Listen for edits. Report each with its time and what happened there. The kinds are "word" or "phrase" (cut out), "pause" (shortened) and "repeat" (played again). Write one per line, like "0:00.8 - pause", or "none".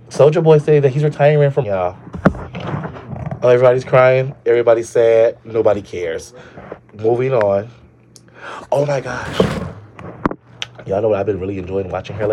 0:01.6 - word